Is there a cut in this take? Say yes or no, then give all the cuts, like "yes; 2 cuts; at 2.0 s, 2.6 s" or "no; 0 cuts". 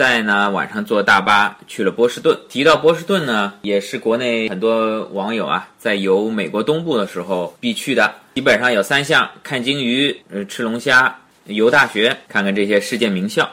yes; 1 cut; at 10.2 s